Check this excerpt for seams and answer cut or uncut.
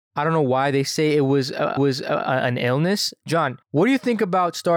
cut